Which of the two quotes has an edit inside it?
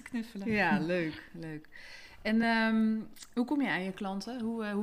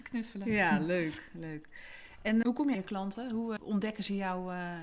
second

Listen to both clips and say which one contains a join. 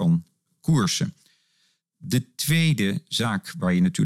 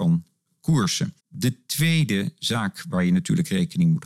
second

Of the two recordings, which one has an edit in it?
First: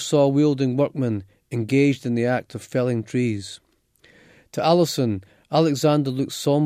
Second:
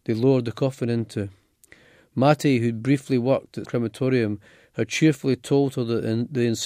second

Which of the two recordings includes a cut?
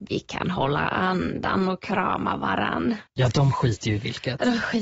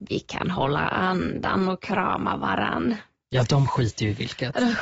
first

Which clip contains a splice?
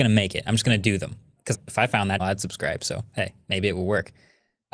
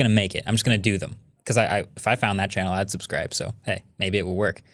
first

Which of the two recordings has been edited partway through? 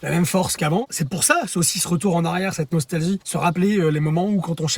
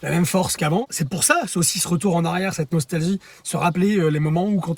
first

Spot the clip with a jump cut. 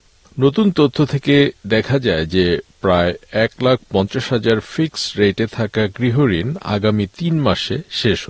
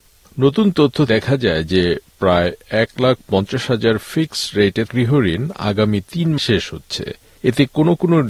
second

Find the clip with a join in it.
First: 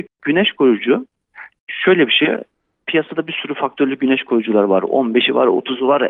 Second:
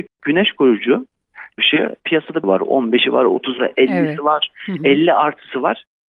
second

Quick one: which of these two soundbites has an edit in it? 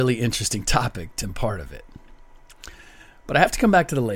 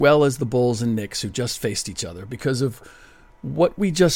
first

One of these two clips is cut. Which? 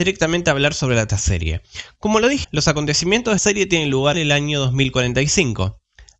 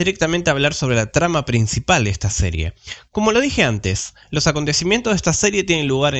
first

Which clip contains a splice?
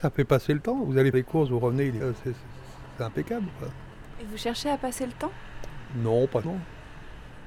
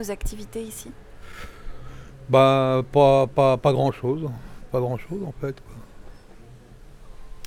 first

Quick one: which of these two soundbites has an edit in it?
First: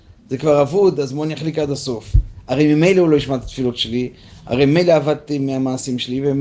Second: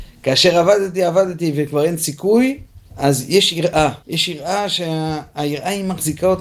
second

